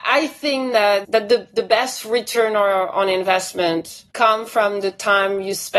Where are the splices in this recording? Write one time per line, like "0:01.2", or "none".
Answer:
0:04.1